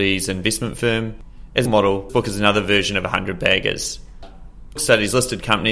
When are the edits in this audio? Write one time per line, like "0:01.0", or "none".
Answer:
0:01.7
0:02.1
0:04.8